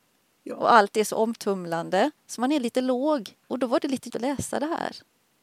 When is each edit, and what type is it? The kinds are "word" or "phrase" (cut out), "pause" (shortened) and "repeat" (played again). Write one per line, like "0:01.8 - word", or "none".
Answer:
0:02.2 - pause
0:03.4 - pause
0:04.1 - word